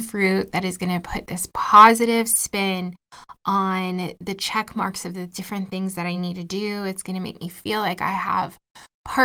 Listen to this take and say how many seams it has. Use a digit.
0